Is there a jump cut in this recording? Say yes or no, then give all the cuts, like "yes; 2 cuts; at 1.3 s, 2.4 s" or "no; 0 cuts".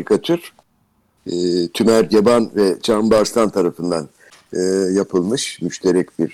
no; 0 cuts